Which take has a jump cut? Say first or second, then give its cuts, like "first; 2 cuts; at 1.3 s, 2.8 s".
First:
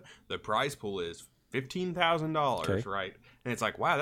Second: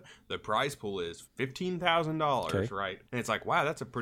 second; 2 cuts; at 1.3 s, 3.1 s